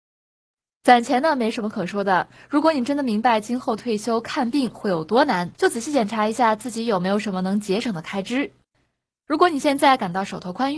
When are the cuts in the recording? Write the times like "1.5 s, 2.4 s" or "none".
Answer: 5.5 s